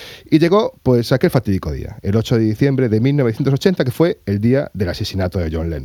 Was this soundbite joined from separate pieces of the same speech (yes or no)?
no